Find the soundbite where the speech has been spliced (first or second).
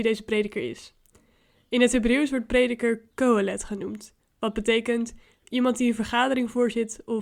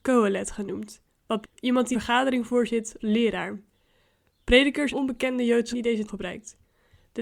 second